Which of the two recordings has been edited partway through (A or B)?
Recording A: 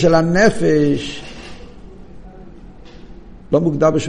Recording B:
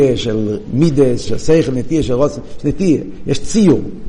B